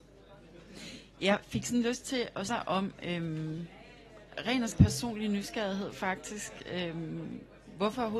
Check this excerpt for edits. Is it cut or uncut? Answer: cut